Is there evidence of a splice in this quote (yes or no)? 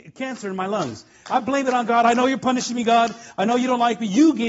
no